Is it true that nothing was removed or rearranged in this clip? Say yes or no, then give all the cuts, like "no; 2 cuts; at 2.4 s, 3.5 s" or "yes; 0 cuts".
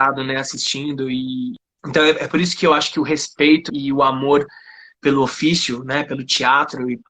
no; 1 cut; at 3.7 s